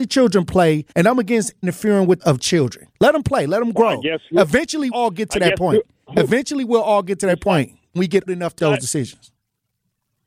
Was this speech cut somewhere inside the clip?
yes; 8 cuts; at 0.9 s, 1.6 s, 2.2 s, 2.9 s, 4.9 s, 8.0 s, 8.3 s, 8.6 s

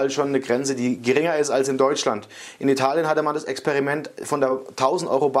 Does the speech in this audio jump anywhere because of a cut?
no; 0 cuts

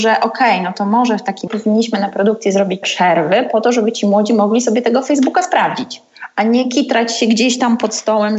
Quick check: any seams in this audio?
yes; 2 cuts; at 1.5 s, 2.8 s

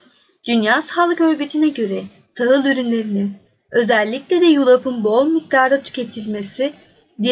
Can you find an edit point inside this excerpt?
no; 0 cuts

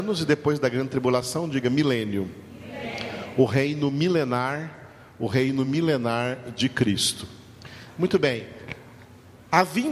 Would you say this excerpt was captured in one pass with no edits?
yes; 0 cuts

